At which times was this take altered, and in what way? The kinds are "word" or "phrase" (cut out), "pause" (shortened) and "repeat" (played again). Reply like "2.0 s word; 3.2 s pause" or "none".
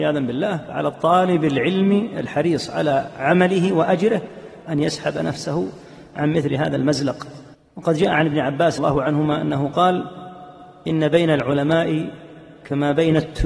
7.5 s pause; 8.8 s word